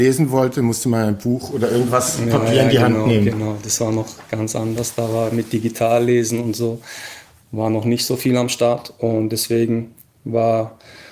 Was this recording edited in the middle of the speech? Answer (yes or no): no